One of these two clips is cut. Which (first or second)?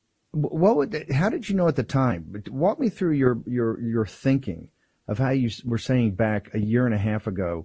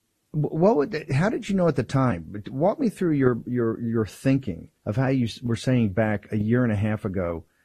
second